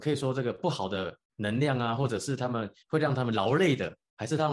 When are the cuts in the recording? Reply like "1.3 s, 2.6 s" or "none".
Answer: 1.2 s, 2.8 s